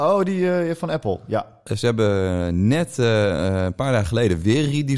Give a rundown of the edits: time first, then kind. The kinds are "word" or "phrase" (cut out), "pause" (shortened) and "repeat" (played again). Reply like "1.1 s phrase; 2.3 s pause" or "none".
none

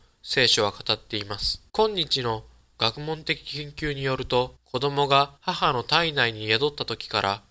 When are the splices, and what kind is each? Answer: 1.7 s pause; 4.6 s pause; 5.4 s pause

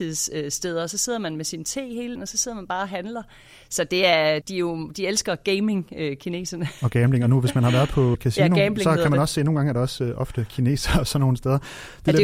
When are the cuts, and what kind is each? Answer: 2.2 s word; 4.4 s word; 8.1 s word

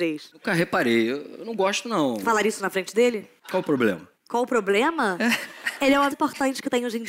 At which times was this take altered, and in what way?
4.2 s pause; 6.1 s word

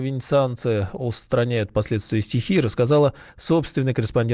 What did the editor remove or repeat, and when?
none

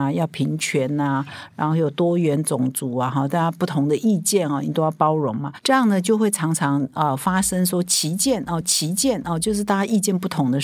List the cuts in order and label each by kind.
8.6 s repeat

